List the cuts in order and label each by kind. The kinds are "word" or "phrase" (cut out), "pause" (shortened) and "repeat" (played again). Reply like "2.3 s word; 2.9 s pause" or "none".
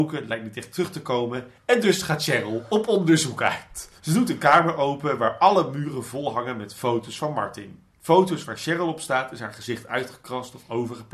4.0 s pause; 7.9 s pause